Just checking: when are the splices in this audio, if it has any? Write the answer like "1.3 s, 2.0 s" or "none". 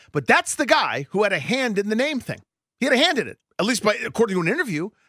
none